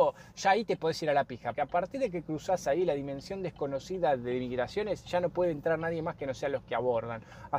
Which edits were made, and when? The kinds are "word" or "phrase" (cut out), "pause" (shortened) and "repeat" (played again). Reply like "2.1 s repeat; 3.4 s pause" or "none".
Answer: 1.5 s word